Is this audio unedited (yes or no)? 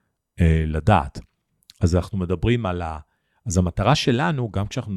yes